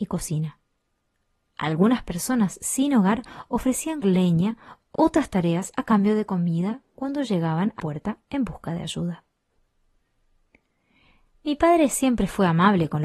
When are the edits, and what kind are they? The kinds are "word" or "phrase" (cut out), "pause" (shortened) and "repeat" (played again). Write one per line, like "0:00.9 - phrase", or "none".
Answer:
0:04.0 - word
0:04.9 - word
0:07.8 - word